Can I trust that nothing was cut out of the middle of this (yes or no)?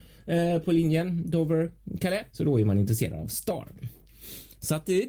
no